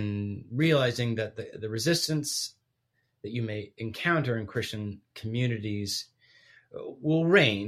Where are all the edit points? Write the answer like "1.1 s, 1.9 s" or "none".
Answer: none